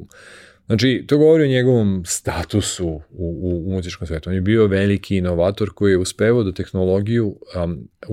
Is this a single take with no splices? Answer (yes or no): yes